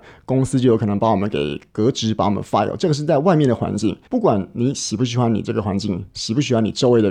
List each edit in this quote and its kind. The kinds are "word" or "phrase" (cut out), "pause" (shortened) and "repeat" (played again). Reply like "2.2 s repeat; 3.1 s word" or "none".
4.1 s pause